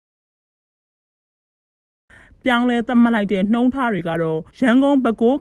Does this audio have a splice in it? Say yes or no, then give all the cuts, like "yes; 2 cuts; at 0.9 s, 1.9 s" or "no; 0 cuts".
yes; 1 cut; at 4.5 s